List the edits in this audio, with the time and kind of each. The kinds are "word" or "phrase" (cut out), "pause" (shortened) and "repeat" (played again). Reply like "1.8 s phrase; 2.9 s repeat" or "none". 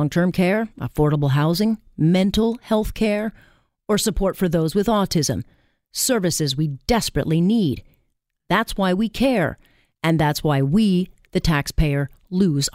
none